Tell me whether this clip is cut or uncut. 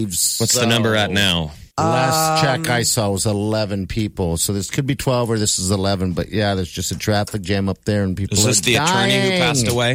cut